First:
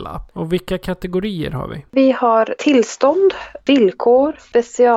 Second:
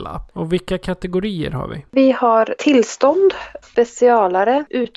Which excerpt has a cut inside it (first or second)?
second